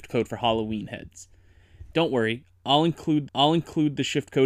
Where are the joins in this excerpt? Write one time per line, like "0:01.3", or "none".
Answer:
0:03.3